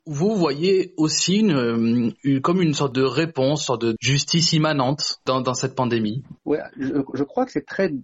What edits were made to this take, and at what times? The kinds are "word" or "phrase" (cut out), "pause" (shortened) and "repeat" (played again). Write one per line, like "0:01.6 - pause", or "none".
0:06.4 - pause